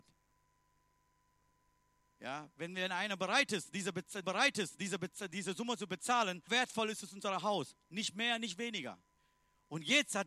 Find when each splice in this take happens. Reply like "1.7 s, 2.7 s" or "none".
4.2 s, 6.5 s, 9.2 s

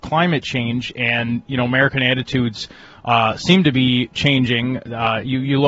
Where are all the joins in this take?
none

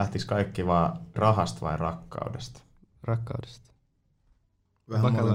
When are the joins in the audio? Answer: 1.2 s

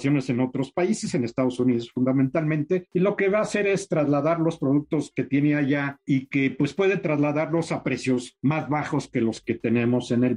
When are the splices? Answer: none

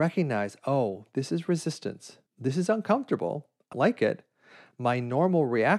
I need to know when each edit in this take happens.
2.3 s, 3.7 s

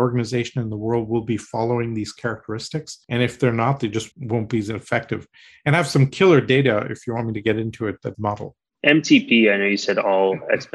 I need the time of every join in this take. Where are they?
3.0 s, 4.1 s, 8.1 s

